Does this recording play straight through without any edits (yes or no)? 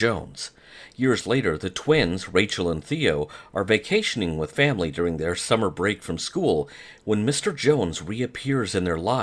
yes